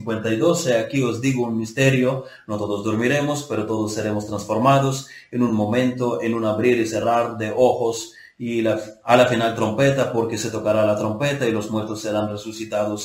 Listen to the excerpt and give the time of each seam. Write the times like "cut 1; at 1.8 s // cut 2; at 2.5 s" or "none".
none